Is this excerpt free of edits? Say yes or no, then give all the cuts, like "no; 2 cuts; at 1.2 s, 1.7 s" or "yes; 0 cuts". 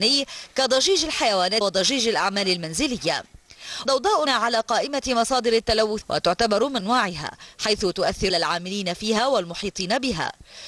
no; 6 cuts; at 1.6 s, 3.9 s, 4.3 s, 6.0 s, 6.8 s, 8.3 s